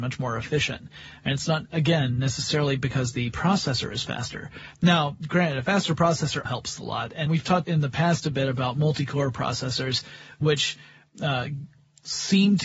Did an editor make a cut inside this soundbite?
yes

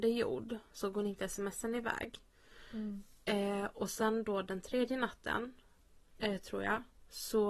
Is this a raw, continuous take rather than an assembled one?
yes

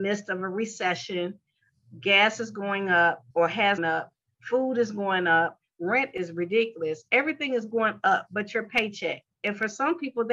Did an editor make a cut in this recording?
yes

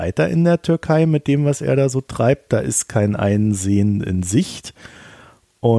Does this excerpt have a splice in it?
no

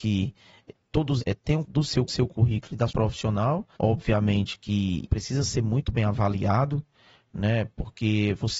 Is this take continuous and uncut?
no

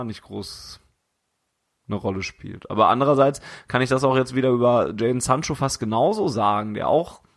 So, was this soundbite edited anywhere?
no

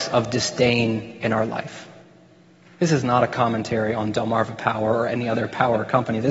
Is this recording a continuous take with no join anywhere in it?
yes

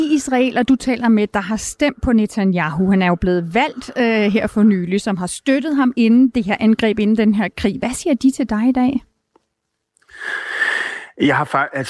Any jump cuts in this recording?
no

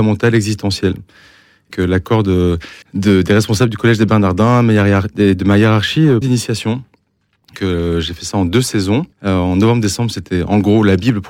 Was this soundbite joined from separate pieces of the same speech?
yes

